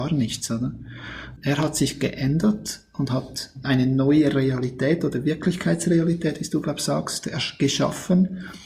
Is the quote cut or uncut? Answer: cut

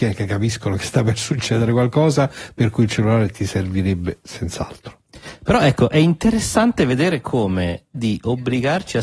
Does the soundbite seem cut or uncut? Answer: cut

